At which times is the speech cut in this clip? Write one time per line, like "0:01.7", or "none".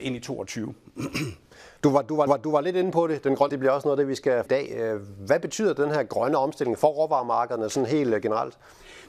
0:01.8
0:02.3
0:03.5
0:04.5